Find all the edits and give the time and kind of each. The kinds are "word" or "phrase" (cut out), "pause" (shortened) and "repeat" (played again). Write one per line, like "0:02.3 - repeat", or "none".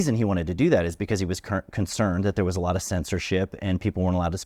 none